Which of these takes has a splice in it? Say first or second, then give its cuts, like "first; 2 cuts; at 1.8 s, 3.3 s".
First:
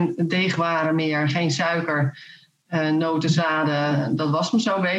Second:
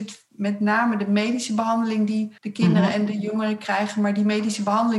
second; 1 cut; at 2.4 s